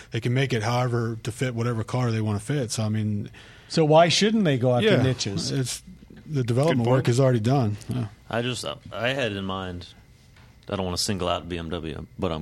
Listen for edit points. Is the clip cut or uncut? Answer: uncut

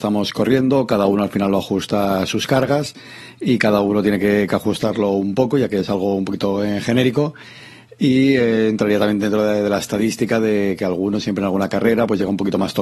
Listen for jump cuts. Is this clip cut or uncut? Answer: uncut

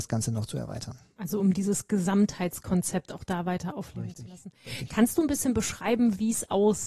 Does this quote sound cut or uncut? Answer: uncut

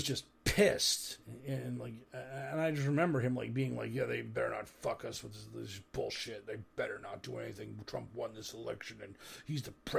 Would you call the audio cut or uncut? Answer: uncut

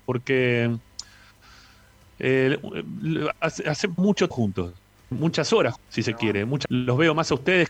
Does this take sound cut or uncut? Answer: cut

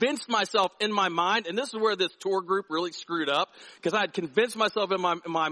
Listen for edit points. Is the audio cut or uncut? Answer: uncut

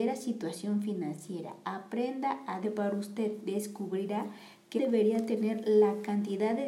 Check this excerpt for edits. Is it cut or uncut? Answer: cut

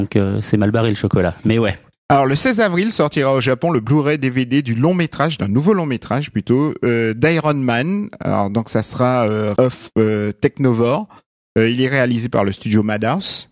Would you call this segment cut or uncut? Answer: cut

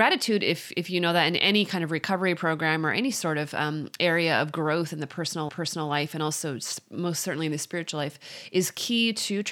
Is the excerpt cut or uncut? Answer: cut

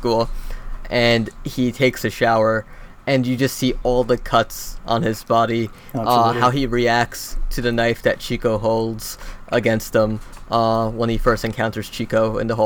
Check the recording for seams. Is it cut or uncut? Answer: uncut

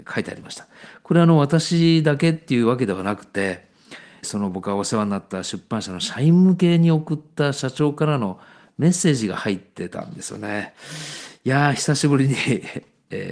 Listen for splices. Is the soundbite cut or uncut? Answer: cut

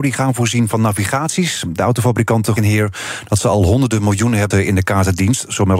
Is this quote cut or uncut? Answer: cut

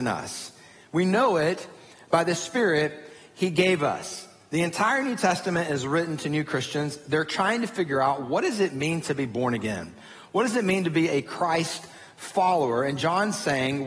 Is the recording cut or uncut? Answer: uncut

